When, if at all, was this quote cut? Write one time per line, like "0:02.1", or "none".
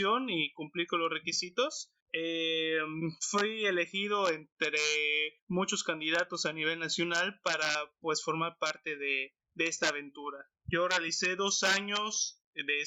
0:02.0
0:05.4